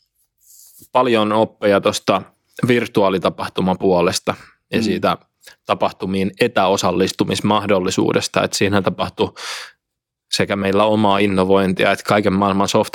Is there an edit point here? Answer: no; 0 cuts

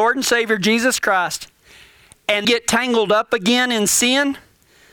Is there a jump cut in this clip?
yes; 1 cut; at 2.4 s

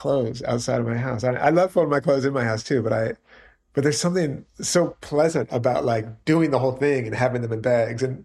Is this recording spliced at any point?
no; 0 cuts

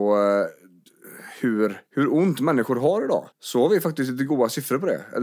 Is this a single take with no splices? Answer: no; 2 cuts; at 1.9 s, 3.3 s

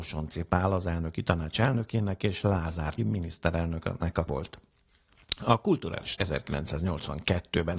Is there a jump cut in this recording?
yes; 3 cuts; at 3.0 s, 4.3 s, 6.2 s

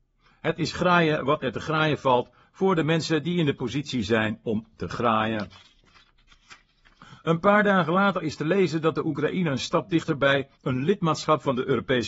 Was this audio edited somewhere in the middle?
yes; 1 cut; at 10.5 s

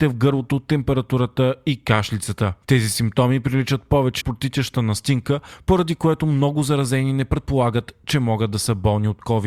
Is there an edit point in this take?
yes; 1 cut; at 4.2 s

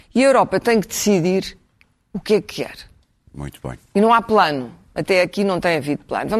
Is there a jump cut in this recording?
no; 0 cuts

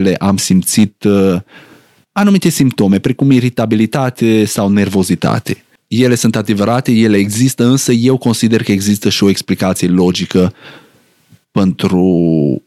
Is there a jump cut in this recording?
no; 0 cuts

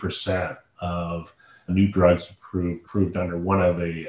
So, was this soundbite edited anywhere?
yes; 2 cuts; at 1.7 s, 2.8 s

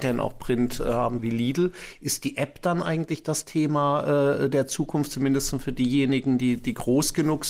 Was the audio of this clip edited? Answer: yes; 1 cut; at 1.2 s

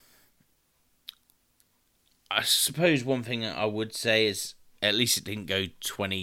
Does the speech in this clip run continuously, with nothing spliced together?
yes; 0 cuts

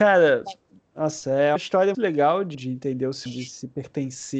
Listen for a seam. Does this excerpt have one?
yes; 4 cuts; at 1.6 s, 1.9 s, 2.5 s, 3.3 s

